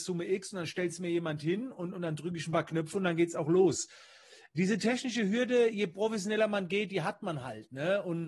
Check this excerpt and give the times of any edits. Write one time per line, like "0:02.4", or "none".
none